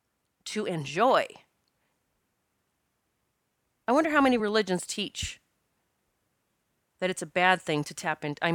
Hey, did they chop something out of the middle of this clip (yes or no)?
no